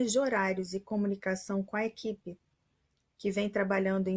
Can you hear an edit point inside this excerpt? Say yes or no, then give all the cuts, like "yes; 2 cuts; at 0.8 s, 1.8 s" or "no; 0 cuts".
no; 0 cuts